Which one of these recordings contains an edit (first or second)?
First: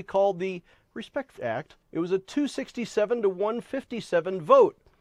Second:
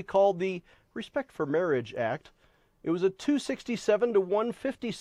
first